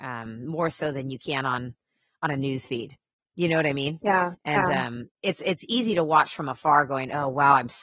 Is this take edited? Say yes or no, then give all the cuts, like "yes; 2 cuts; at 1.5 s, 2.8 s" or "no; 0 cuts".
no; 0 cuts